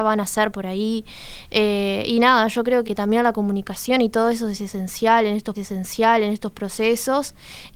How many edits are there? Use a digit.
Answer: 2